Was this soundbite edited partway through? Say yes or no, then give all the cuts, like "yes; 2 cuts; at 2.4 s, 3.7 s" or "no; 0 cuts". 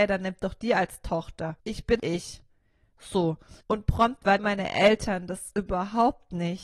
yes; 4 cuts; at 1.6 s, 2.0 s, 3.6 s, 4.4 s